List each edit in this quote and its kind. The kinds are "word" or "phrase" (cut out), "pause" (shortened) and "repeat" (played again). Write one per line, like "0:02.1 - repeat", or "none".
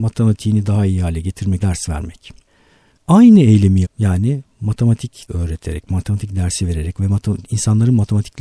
0:01.6 - word
0:03.8 - word
0:05.3 - word